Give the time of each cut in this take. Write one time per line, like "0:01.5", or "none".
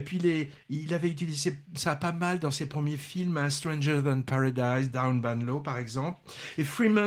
0:01.7